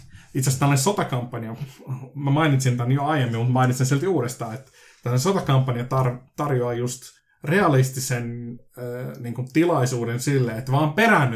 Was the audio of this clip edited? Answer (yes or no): no